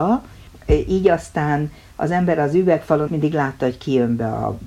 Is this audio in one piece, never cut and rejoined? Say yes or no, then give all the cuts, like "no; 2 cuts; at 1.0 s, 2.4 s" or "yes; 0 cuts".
no; 1 cut; at 3.1 s